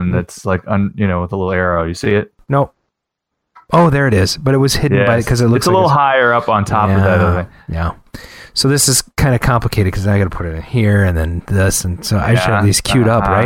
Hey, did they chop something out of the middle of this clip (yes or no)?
no